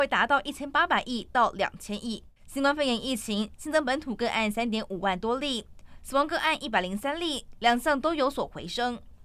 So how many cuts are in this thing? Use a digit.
1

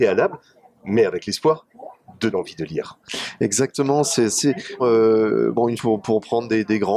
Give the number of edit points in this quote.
4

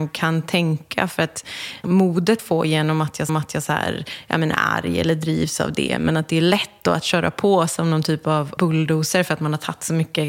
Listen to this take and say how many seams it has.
4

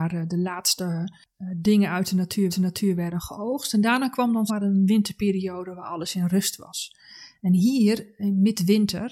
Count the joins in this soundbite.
2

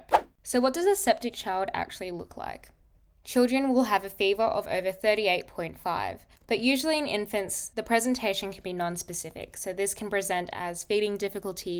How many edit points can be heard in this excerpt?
0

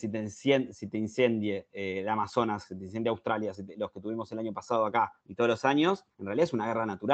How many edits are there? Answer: 2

